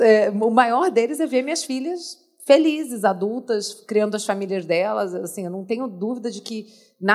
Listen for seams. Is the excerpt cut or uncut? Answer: uncut